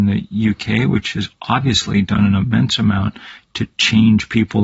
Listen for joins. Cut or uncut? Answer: uncut